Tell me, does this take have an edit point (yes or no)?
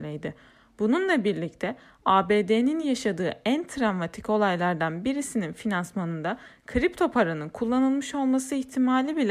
no